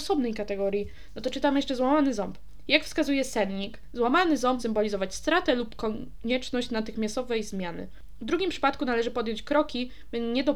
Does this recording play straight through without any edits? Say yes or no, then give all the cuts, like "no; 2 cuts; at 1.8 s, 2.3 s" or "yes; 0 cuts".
no; 1 cut; at 4.6 s